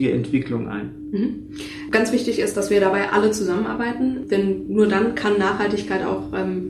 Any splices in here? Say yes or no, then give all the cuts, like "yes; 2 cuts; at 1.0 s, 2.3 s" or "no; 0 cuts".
no; 0 cuts